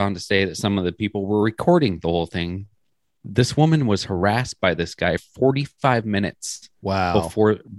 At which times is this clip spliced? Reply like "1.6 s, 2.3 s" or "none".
5.2 s

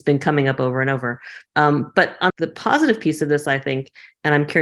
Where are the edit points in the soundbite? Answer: 1.5 s, 2.3 s

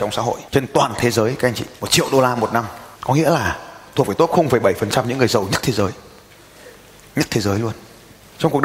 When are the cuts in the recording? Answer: none

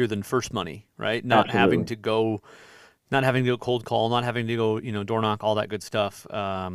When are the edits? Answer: none

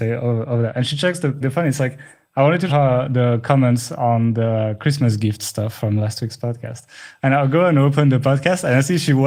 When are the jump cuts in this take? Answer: 1.4 s, 2.7 s

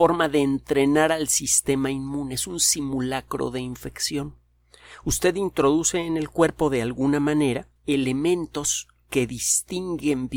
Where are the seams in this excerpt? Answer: 7.8 s

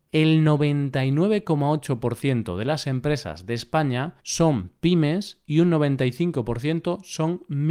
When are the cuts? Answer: 4.2 s

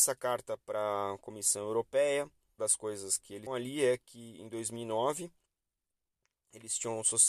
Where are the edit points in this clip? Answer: 2.6 s, 3.5 s

